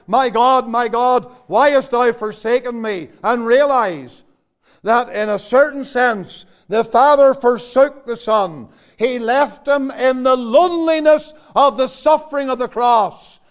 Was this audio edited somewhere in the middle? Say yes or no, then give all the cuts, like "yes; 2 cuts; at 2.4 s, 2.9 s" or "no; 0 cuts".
no; 0 cuts